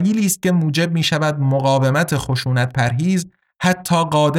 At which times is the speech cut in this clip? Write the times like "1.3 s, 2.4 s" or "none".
none